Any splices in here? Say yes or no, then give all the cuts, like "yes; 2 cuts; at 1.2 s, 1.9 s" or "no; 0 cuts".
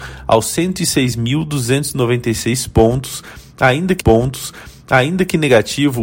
yes; 1 cut; at 4.0 s